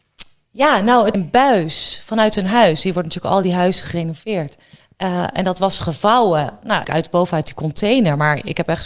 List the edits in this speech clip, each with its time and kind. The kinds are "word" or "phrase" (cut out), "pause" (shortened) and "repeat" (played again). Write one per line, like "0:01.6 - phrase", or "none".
0:01.1 - phrase
0:06.8 - phrase